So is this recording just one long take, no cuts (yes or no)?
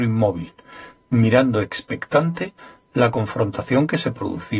yes